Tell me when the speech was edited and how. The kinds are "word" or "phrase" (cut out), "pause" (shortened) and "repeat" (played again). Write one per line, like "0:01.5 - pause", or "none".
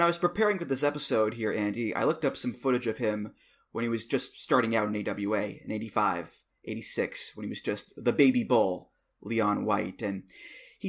none